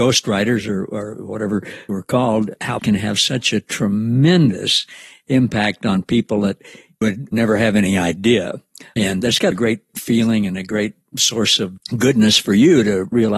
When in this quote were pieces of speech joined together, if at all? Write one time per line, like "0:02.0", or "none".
0:02.8
0:07.0
0:09.5